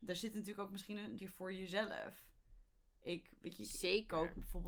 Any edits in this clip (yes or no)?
yes